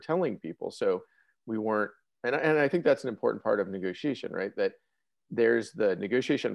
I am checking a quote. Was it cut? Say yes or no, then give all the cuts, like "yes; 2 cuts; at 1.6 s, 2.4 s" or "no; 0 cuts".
no; 0 cuts